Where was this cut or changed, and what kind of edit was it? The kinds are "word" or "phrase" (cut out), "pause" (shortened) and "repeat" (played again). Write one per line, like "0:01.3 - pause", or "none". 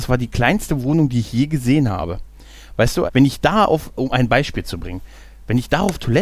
0:03.1 - word